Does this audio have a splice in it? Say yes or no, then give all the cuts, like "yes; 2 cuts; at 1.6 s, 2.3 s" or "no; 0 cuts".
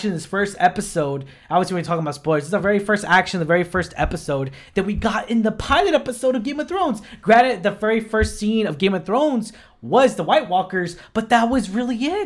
no; 0 cuts